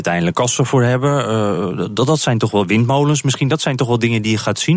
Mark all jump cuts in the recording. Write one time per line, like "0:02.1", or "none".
none